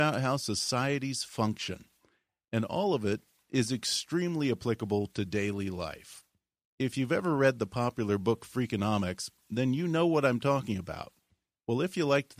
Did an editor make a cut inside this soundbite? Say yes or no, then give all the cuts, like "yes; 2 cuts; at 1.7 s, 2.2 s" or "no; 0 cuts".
no; 0 cuts